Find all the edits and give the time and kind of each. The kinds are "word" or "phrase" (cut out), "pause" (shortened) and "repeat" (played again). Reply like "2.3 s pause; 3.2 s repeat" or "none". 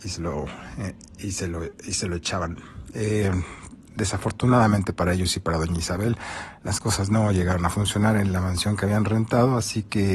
none